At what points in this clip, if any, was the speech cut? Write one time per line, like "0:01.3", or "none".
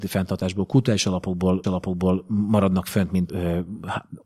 0:01.6
0:03.3